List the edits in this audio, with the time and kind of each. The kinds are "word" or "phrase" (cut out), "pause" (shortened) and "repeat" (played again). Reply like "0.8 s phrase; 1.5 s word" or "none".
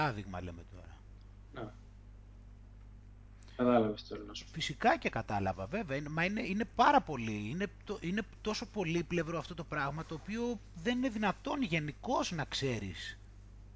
none